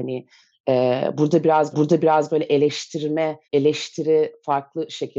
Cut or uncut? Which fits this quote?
cut